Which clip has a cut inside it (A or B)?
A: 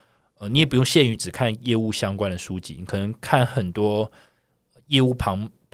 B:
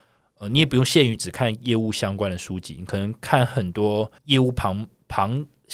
B